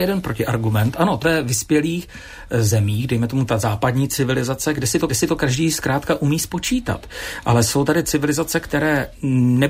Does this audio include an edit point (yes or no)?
yes